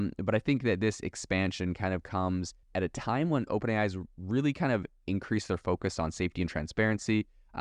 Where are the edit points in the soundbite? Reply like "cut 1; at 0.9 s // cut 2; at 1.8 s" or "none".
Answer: cut 1; at 2.6 s